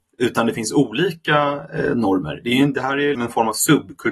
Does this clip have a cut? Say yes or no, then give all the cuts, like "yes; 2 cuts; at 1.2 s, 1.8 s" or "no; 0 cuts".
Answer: yes; 1 cut; at 3.1 s